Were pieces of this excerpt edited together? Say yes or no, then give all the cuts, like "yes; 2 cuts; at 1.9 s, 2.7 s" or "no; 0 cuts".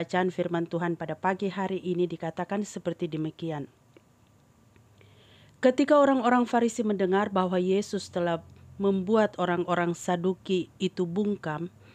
no; 0 cuts